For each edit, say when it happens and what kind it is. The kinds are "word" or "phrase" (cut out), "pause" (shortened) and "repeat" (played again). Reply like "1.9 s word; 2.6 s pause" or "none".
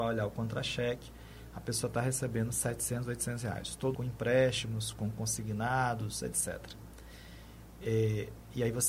3.9 s phrase